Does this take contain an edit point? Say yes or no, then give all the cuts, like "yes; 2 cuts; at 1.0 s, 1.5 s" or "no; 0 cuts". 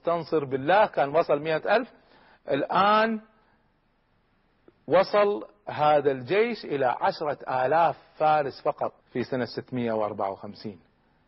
yes; 1 cut; at 9.0 s